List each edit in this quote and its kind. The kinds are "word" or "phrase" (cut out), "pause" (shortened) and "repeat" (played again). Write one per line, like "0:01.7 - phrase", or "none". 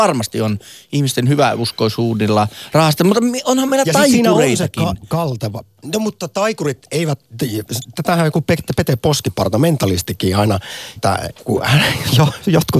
0:11.0 - phrase

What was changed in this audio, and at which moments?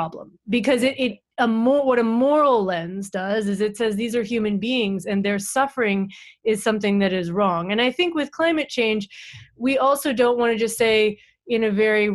none

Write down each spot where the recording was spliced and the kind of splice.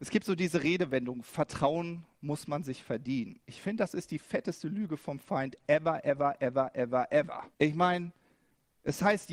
0:07.5 - pause

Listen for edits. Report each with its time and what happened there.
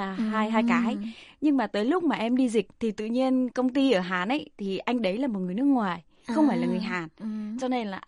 0:02.7 - pause
0:03.5 - word

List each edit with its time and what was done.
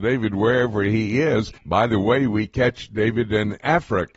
0:01.6 - pause

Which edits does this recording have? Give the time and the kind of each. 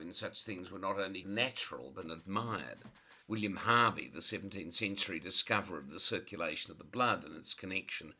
0:01.2 - word
0:02.0 - word
0:03.2 - pause

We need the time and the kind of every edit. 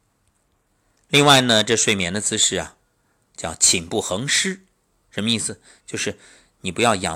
none

